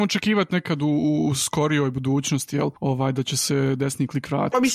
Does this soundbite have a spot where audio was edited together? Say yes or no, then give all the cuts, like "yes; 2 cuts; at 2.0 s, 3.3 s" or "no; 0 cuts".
yes; 1 cut; at 2.8 s